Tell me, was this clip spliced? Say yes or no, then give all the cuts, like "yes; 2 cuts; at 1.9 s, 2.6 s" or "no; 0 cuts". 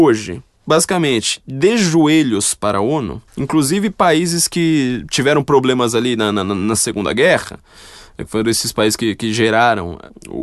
yes; 1 cut; at 3.3 s